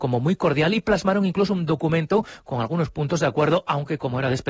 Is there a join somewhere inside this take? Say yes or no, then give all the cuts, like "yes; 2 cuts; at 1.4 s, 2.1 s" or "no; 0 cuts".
no; 0 cuts